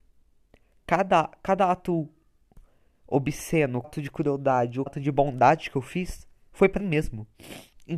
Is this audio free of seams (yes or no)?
no